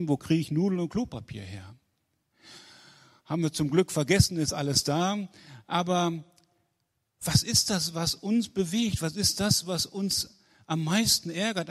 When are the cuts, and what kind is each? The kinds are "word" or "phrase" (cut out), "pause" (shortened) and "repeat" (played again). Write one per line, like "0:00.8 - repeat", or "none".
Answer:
none